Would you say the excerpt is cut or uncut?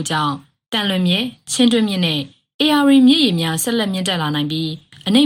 uncut